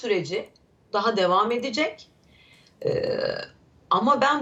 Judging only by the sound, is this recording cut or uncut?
uncut